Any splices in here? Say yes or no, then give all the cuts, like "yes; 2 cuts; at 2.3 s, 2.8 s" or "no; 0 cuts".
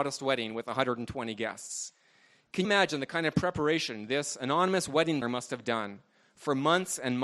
yes; 2 cuts; at 2.6 s, 5.2 s